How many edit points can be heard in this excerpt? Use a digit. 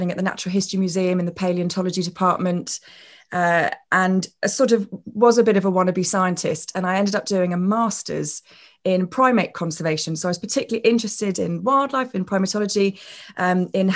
0